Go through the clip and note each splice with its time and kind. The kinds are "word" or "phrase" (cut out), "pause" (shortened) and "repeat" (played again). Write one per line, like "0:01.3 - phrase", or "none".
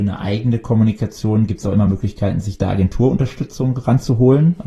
none

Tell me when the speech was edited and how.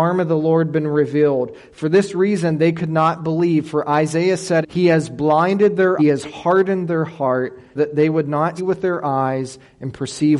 0:04.6 - word
0:06.0 - phrase
0:07.8 - word
0:08.6 - word

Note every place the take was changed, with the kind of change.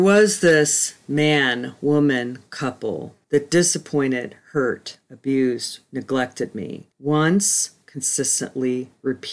0:03.2 - pause

